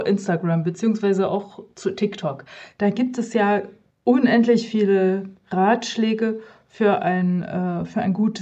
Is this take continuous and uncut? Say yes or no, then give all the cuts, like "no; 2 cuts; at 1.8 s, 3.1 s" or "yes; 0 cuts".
yes; 0 cuts